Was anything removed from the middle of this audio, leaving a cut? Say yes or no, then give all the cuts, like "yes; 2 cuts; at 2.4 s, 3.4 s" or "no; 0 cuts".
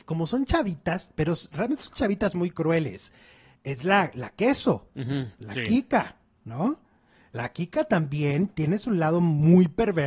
no; 0 cuts